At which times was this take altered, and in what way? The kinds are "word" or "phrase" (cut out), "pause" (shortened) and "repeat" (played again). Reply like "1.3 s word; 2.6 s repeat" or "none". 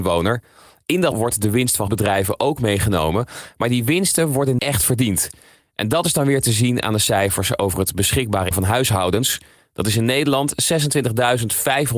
1.1 s word; 1.9 s word; 4.6 s word; 8.5 s word